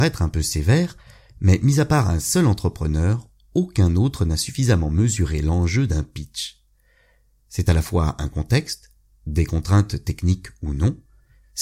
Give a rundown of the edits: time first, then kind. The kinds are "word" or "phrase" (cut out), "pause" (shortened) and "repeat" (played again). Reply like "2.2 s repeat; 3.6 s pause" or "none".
none